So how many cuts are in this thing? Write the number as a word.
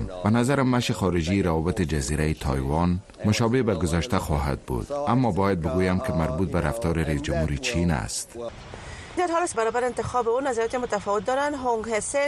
two